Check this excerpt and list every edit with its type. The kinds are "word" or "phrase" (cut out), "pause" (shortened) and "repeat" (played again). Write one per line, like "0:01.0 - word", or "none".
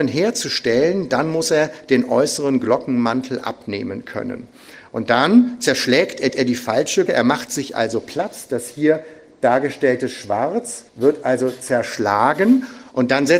0:06.3 - repeat
0:07.1 - word
0:10.9 - pause